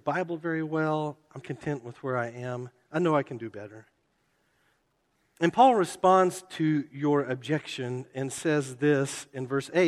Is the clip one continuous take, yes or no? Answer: no